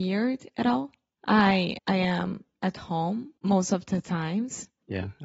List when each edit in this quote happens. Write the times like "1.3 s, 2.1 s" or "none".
1.8 s, 3.4 s